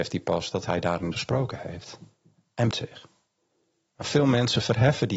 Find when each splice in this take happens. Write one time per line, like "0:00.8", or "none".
0:01.1
0:02.7